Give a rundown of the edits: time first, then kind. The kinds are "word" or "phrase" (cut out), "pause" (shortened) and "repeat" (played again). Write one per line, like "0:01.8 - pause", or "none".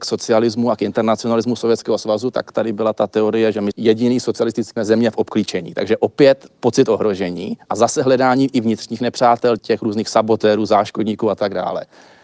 0:03.7 - phrase
0:04.8 - phrase
0:07.6 - pause
0:09.6 - word